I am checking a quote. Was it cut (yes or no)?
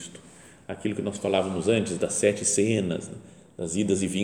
no